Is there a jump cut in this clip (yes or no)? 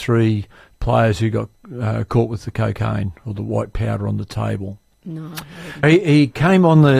yes